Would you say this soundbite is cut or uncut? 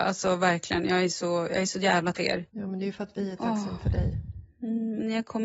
cut